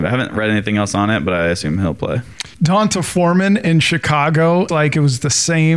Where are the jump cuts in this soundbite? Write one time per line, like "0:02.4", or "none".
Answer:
0:02.5
0:04.7